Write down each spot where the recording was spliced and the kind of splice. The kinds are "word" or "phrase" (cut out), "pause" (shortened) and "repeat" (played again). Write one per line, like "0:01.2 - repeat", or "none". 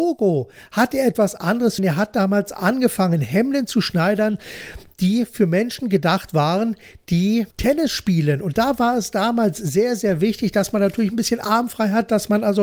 0:01.8 - phrase
0:07.5 - pause